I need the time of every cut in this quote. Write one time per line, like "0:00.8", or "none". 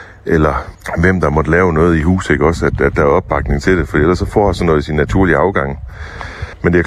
none